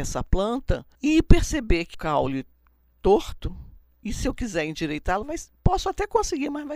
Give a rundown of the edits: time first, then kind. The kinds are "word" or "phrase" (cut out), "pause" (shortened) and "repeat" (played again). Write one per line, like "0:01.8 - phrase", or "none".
0:00.9 - pause
0:01.9 - phrase